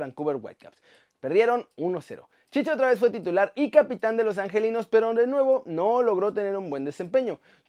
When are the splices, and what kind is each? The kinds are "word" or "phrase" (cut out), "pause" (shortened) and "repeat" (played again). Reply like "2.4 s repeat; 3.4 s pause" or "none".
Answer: none